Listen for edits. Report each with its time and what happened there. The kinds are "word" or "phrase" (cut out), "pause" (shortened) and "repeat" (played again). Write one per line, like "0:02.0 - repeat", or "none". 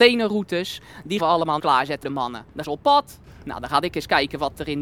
0:01.2 - word
0:01.6 - word
0:02.0 - word
0:02.6 - word